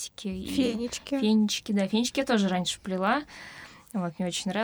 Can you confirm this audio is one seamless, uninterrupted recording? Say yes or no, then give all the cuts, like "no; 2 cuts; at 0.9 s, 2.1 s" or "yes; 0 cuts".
yes; 0 cuts